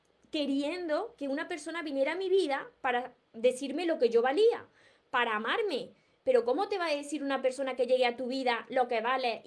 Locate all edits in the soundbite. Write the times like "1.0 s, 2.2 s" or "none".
none

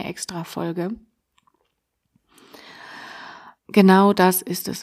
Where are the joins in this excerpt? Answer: 3.6 s

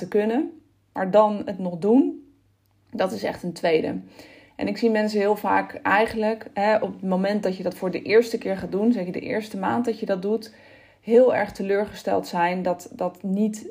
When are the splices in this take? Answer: none

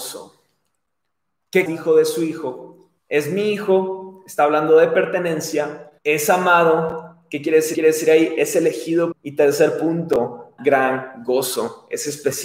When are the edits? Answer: 1.7 s, 3.0 s, 6.0 s, 7.7 s, 9.1 s, 10.6 s

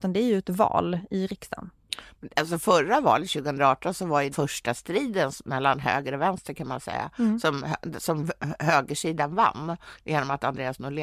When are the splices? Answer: 4.3 s

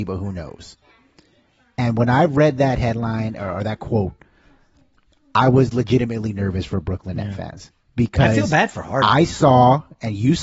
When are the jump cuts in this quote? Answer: none

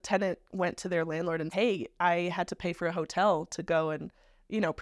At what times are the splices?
1.5 s

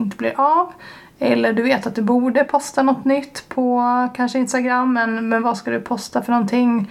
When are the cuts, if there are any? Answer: none

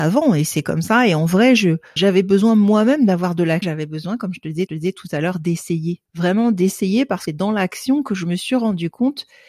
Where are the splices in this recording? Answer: 2.0 s, 3.6 s, 4.7 s, 6.0 s, 7.3 s

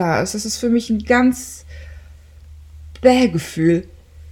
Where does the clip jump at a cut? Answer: none

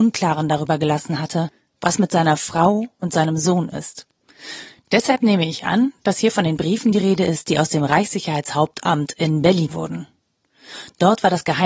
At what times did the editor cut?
9.7 s

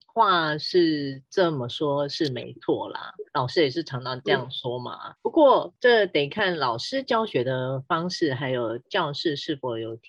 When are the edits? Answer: 3.3 s

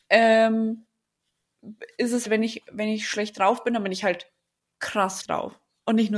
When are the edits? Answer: 2.2 s, 5.2 s

